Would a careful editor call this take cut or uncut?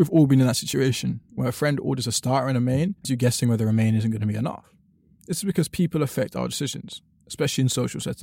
cut